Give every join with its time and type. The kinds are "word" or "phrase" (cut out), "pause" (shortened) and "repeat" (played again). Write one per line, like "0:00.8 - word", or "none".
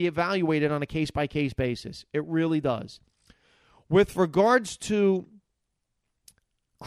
none